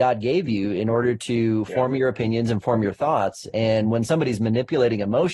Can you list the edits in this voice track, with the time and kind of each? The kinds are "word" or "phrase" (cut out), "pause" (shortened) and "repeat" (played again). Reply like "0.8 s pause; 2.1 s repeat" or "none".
none